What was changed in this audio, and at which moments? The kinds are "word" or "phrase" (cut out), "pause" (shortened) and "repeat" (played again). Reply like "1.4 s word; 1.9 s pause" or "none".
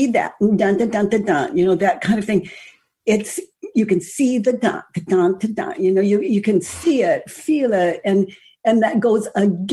none